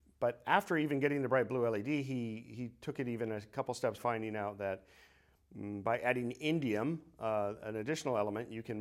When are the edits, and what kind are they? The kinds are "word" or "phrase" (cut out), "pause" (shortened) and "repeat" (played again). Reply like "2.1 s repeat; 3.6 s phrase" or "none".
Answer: 4.0 s phrase